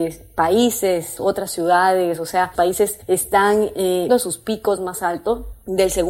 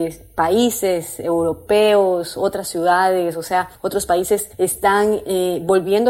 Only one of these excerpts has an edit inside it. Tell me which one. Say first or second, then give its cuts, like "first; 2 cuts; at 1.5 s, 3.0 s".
first; 3 cuts; at 1.2 s, 2.6 s, 4.1 s